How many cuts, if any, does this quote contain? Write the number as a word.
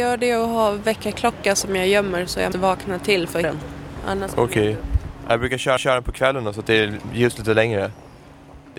four